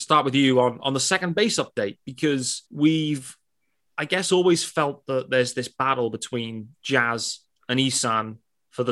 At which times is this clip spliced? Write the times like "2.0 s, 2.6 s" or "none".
2.7 s, 6.7 s